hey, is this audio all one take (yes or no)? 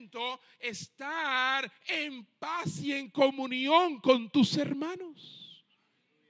yes